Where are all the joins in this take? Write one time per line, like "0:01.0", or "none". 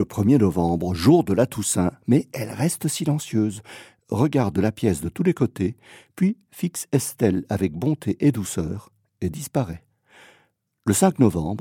none